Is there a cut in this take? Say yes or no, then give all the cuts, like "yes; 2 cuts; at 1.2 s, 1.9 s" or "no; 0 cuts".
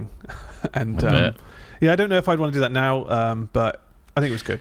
no; 0 cuts